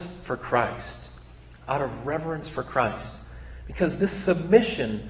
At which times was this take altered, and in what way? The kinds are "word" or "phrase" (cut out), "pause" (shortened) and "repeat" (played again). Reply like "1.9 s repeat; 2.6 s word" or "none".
none